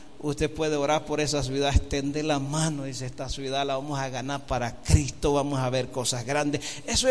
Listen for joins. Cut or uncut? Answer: uncut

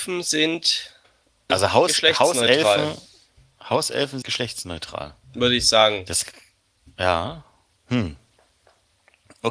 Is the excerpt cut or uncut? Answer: cut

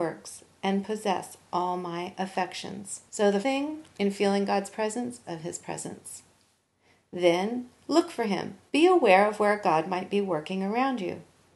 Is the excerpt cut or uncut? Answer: cut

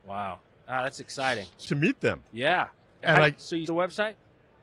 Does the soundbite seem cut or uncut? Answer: cut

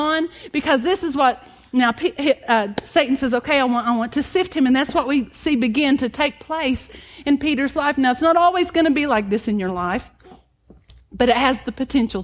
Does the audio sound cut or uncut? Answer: uncut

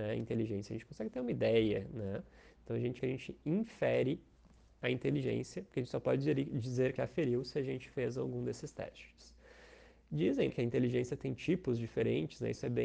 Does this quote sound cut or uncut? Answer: cut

